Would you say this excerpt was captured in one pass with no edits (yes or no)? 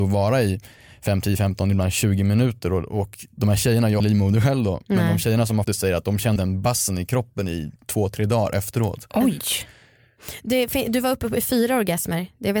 no